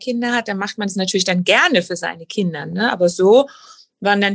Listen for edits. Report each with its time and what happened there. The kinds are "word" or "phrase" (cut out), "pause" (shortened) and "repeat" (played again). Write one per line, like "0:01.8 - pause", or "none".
none